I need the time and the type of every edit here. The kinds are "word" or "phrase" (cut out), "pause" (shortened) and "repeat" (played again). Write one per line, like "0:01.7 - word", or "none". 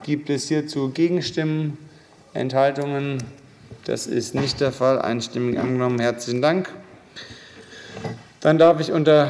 none